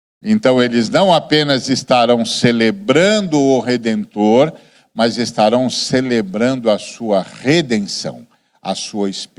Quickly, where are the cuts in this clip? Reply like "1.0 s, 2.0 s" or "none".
none